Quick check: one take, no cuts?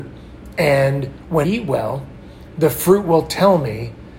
no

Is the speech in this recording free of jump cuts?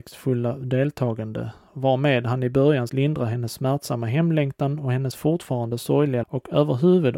no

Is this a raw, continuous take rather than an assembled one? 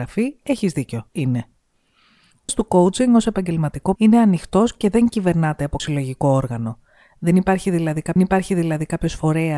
no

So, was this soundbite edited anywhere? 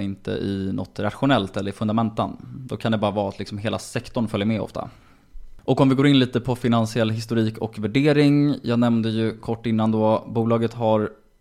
no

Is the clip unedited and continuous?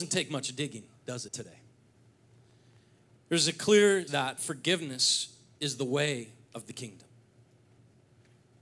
no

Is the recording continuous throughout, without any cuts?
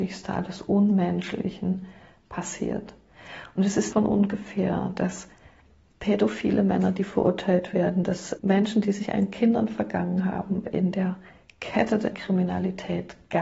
no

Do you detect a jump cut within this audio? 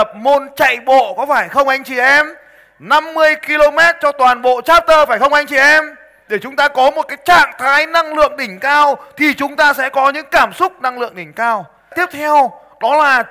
no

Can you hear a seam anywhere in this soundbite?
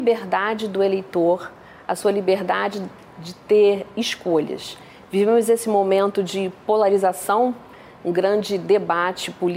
no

